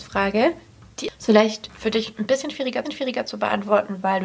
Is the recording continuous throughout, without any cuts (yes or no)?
no